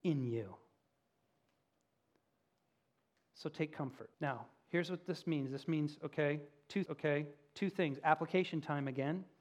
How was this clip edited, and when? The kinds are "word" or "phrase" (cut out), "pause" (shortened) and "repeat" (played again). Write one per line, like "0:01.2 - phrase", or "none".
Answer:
0:04.1 - pause
0:06.9 - repeat

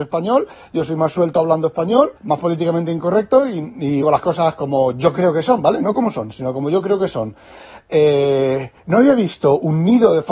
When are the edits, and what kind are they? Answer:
0:02.2 - pause
0:04.0 - phrase
0:08.8 - pause

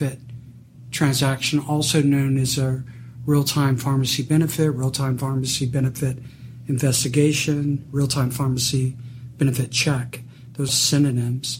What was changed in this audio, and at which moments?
0:10.7 - phrase

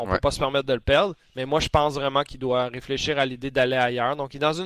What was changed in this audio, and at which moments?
none

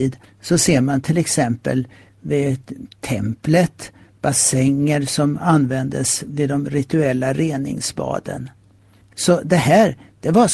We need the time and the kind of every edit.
none

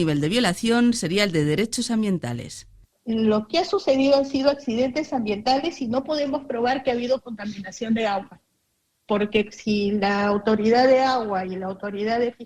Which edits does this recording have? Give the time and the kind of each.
none

